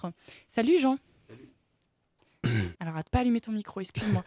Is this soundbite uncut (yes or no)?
no